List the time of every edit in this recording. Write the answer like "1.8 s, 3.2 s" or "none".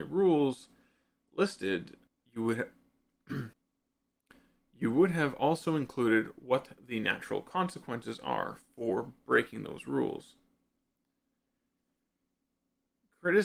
2.1 s, 3.5 s